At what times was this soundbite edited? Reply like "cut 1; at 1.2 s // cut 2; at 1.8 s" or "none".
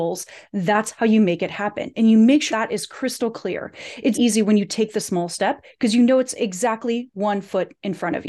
cut 1; at 2.5 s // cut 2; at 4.1 s

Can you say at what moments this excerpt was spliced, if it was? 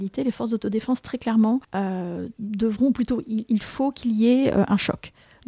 cut 1; at 1.6 s

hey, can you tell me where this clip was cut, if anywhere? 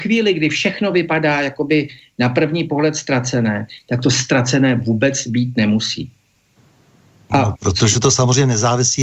none

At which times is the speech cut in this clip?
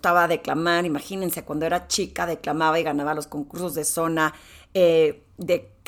none

